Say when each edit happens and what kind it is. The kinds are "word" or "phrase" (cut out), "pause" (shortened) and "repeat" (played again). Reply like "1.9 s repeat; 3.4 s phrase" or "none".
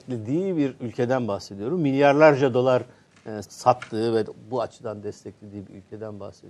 3.4 s word